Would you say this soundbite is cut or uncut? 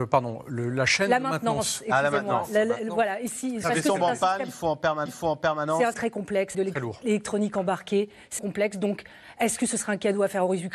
cut